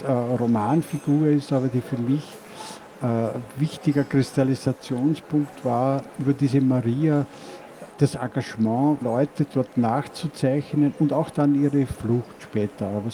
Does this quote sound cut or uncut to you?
cut